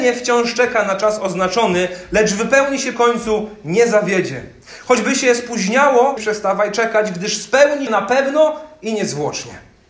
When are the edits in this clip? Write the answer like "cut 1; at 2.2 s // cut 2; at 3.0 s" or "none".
cut 1; at 2.9 s // cut 2; at 6.2 s // cut 3; at 7.9 s